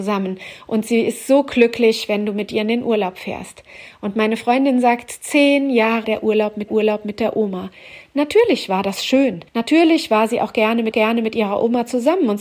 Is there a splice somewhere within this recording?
yes; 4 cuts; at 6.0 s, 6.7 s, 9.5 s, 10.9 s

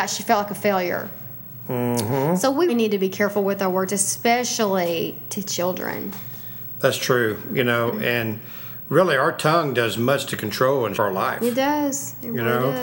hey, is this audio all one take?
no; 2 cuts; at 2.7 s, 10.9 s

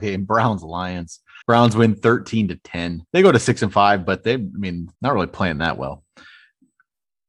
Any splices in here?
yes; 3 cuts; at 1.4 s, 3.1 s, 4.9 s

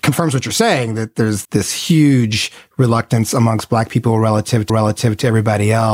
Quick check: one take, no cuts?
no; 2 cuts; at 1.4 s, 4.7 s

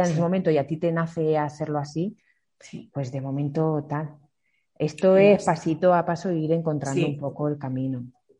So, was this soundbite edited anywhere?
no; 0 cuts

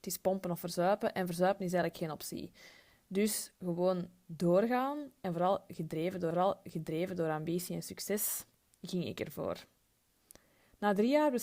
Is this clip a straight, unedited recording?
no; 1 cut; at 6.3 s

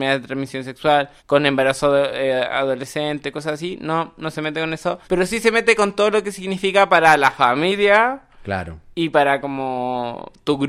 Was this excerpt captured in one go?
no; 2 cuts; at 1.2 s, 5.0 s

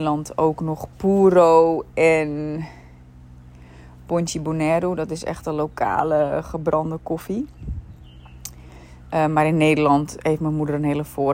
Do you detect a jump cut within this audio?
yes; 1 cut; at 0.9 s

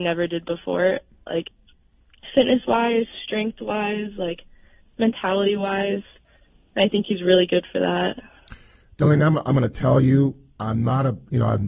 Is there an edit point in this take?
no; 0 cuts

